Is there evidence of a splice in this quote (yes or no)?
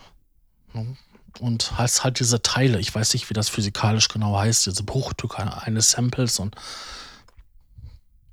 no